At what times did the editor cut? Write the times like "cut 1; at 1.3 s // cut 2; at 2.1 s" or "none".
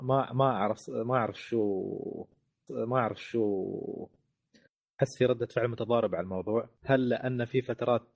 cut 1; at 2.7 s // cut 2; at 6.8 s

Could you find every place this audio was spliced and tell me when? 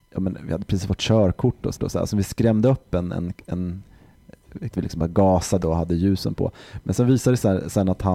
cut 1; at 1.8 s // cut 2; at 2.1 s // cut 3; at 3.1 s // cut 4; at 4.7 s // cut 5; at 5.6 s

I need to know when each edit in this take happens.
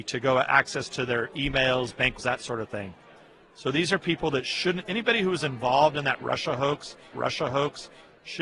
cut 1; at 2.2 s // cut 2; at 7.1 s

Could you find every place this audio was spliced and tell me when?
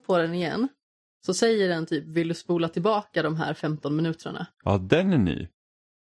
cut 1; at 4.5 s

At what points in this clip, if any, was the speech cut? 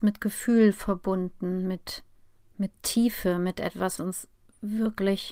cut 1; at 4.0 s

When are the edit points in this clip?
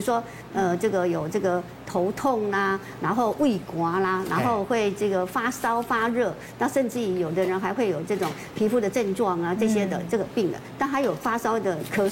none

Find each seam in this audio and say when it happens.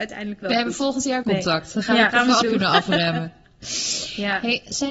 cut 1; at 1.2 s // cut 2; at 2.1 s // cut 3; at 2.4 s

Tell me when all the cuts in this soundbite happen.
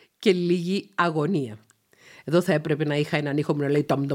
none

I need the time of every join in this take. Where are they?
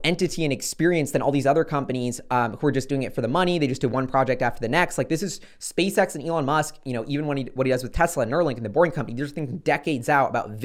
none

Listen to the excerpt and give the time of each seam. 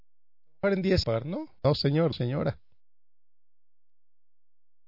cut 1; at 1.0 s // cut 2; at 1.6 s // cut 3; at 2.1 s

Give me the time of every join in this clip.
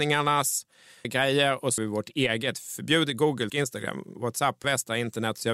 cut 1; at 1.0 s // cut 2; at 1.8 s // cut 3; at 3.5 s // cut 4; at 4.6 s

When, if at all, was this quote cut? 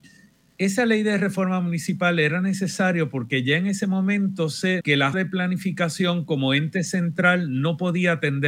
cut 1; at 4.8 s // cut 2; at 5.1 s

